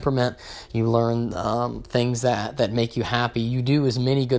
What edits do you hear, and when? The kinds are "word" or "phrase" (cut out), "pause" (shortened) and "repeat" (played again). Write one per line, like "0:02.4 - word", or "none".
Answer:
none